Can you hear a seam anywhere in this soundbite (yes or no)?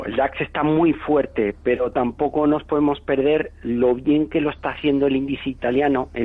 no